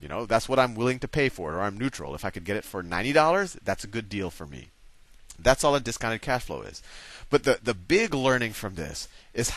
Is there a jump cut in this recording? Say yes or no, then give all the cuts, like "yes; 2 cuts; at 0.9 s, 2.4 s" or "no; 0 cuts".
no; 0 cuts